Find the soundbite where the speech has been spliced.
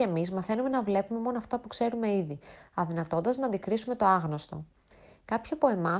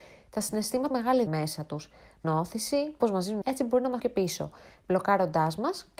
second; 6 cuts; at 0.9 s, 1.3 s, 2.2 s, 3.0 s, 3.4 s, 4.0 s

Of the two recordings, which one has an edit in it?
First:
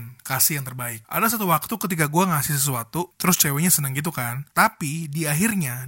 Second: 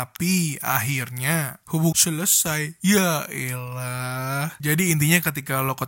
second; 1 cut; at 1.9 s

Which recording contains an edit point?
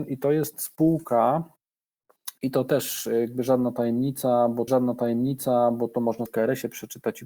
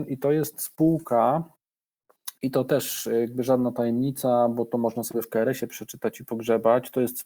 first; 2 cuts; at 4.7 s, 6.3 s

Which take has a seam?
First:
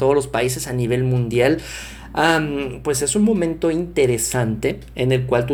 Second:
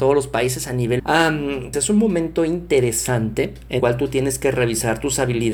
second; 3 cuts; at 1.0 s, 1.7 s, 3.8 s

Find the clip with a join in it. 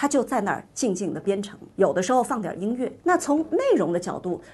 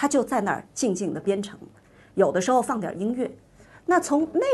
first; 2 cuts; at 1.7 s, 3.0 s

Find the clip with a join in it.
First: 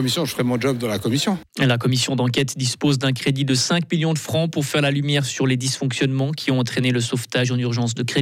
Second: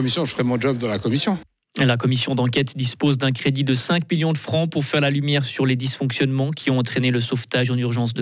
first; 1 cut; at 1.5 s

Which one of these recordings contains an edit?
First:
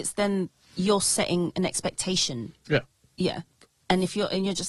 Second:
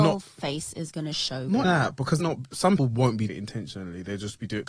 second; 4 cuts; at 1.6 s, 2.2 s, 2.8 s, 3.3 s

